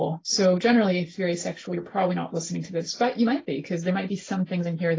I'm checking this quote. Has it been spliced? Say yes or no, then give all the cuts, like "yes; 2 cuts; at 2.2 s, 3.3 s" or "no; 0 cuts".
no; 0 cuts